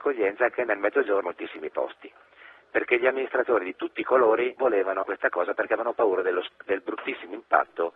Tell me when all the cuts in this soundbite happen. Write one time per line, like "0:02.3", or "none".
0:01.2
0:04.6
0:05.0